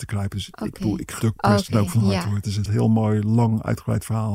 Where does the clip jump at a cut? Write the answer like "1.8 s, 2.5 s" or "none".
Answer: 1.2 s, 2.7 s